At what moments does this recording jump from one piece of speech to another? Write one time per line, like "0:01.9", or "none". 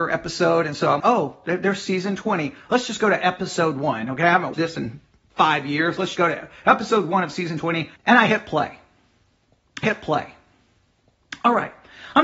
0:01.0
0:04.5
0:06.1
0:08.0
0:09.8